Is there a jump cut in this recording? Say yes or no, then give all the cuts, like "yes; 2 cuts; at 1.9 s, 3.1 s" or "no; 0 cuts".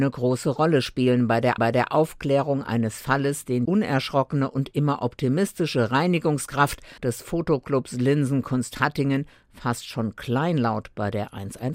yes; 3 cuts; at 1.6 s, 3.7 s, 7.0 s